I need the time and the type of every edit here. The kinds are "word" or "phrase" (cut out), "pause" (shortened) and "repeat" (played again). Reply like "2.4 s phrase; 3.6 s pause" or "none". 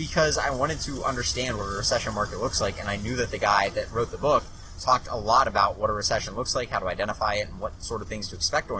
none

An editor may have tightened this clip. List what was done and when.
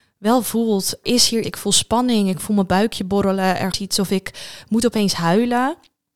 1.0 s word; 1.4 s word; 3.7 s word

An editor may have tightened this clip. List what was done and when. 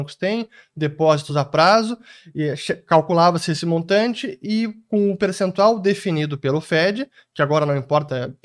none

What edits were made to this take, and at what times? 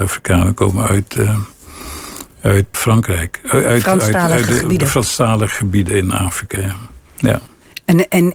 2.7 s word; 7.0 s pause

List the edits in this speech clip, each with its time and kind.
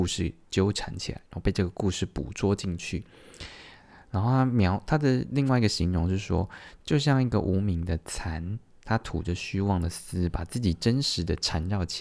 none

